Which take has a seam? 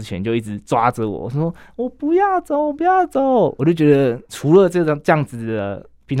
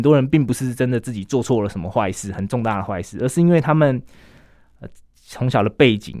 first; 1 cut; at 4.3 s

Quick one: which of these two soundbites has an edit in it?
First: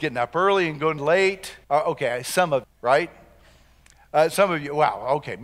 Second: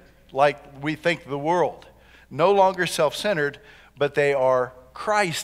first; 3 cuts; at 1.0 s, 1.6 s, 2.6 s

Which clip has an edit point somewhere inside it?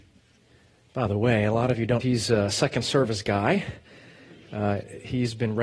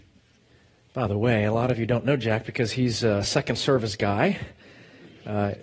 first; 1 cut; at 2.0 s

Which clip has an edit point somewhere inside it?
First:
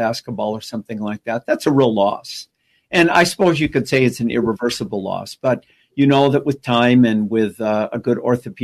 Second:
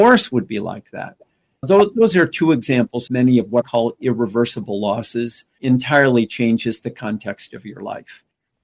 second; 4 cuts; at 1.6 s, 3.1 s, 3.6 s, 5.6 s

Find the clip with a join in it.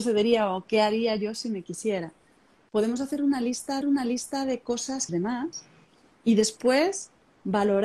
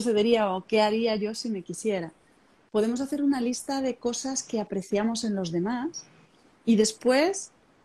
first; 2 cuts; at 3.8 s, 5.1 s

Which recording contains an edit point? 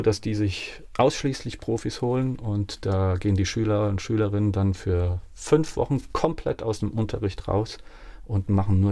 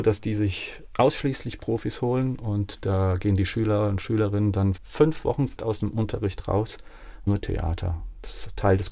second; 3 cuts; at 4.8 s, 5.6 s, 7.3 s

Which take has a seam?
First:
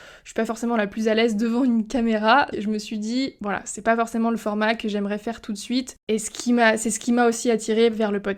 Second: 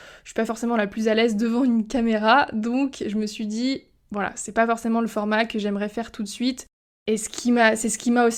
first; 3 cuts; at 2.5 s, 3.4 s, 6.0 s

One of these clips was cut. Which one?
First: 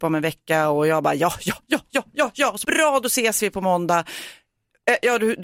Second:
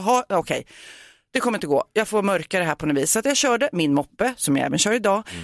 first; 1 cut; at 2.6 s

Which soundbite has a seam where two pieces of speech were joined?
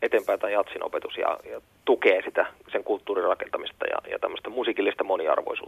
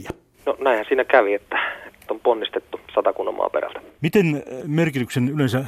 second; 3 cuts; at 2.1 s, 2.8 s, 4.6 s

